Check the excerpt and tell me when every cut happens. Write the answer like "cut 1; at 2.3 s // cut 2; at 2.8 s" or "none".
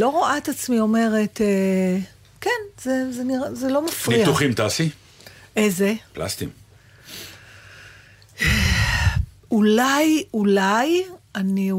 none